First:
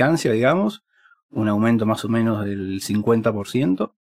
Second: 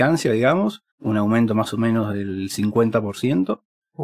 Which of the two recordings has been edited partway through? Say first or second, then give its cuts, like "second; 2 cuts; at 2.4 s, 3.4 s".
second; 1 cut; at 0.9 s